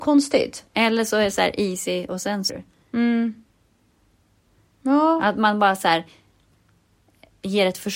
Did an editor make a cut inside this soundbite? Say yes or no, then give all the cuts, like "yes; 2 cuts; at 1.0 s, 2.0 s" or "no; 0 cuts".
yes; 1 cut; at 2.5 s